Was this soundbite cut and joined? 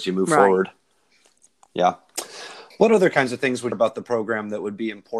yes; 2 cuts; at 2.7 s, 3.7 s

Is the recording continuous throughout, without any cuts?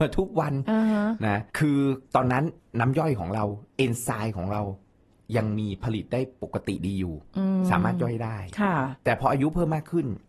no; 3 cuts; at 1.5 s, 2.1 s, 2.6 s

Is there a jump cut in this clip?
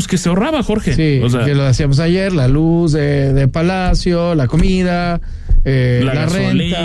no; 0 cuts

